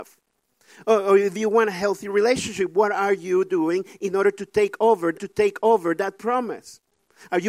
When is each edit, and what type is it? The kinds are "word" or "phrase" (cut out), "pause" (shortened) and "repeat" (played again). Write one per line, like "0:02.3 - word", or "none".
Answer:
0:05.1 - repeat